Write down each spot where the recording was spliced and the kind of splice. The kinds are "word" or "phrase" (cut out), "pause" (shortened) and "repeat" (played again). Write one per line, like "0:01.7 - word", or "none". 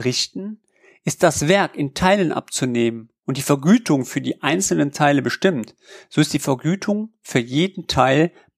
none